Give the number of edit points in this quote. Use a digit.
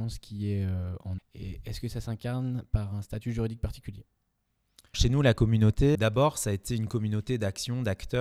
3